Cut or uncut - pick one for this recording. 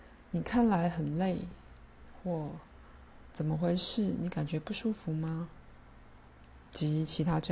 uncut